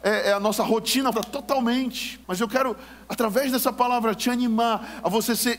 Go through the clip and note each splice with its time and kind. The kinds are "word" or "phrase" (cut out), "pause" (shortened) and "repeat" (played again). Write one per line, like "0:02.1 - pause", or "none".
0:01.1 - phrase
0:02.2 - pause